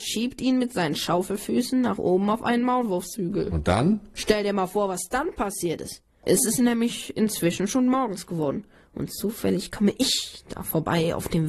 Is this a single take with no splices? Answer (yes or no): yes